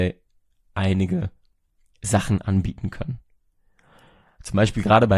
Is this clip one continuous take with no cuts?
yes; 0 cuts

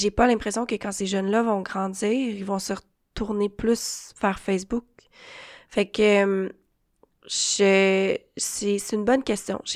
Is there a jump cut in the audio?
no; 0 cuts

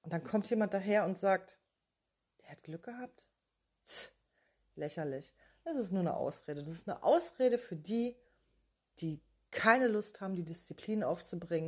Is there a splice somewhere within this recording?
no; 0 cuts

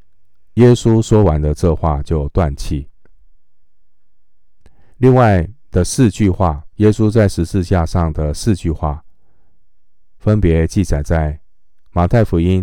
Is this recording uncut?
no; 2 cuts; at 4.9 s, 6.7 s

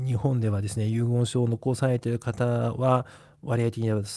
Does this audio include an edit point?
no; 0 cuts

